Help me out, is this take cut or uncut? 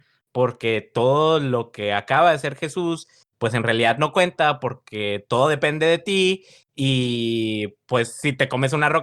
uncut